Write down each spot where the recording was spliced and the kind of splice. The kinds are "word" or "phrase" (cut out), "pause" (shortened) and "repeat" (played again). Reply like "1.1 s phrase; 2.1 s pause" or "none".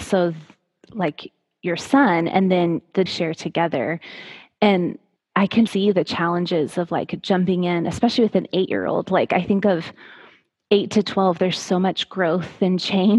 3.1 s phrase; 5.2 s pause; 5.7 s word